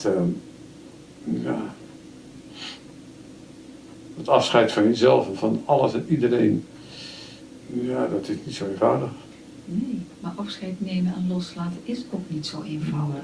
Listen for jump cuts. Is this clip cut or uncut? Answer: cut